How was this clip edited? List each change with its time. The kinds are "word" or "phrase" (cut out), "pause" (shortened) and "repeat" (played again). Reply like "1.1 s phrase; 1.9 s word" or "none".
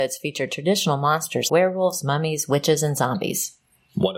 1.5 s word